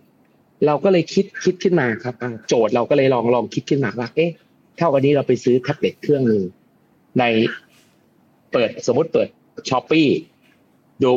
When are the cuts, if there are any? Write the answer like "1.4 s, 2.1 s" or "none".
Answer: none